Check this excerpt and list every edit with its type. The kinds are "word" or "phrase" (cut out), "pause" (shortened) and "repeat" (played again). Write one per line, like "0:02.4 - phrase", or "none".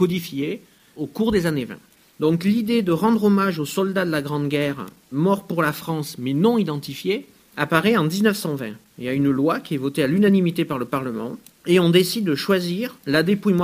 none

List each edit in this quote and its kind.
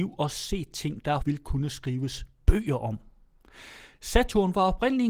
0:01.2 - word

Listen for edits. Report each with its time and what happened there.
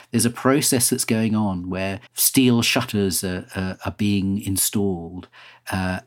0:02.1 - pause

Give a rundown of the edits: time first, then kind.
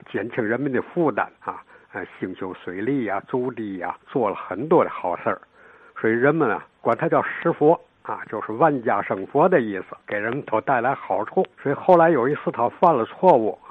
0:01.4 - pause
0:04.0 - pause
0:11.5 - pause

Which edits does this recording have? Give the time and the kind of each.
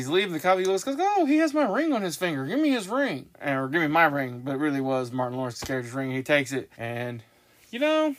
0:03.3 - pause
0:06.7 - pause

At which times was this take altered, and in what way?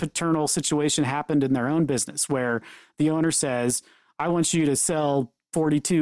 none

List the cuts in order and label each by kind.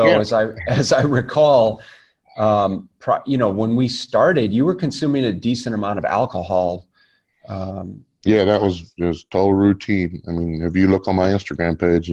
none

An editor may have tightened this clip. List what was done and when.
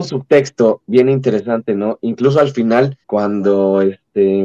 0:03.0 - pause

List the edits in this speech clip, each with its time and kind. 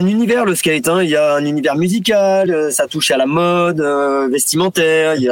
none

